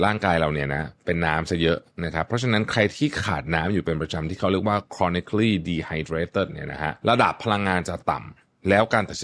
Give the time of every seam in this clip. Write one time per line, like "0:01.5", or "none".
none